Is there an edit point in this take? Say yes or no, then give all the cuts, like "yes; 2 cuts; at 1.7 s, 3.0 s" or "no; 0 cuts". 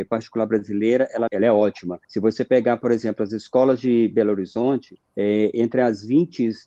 yes; 3 cuts; at 1.3 s, 2.0 s, 5.1 s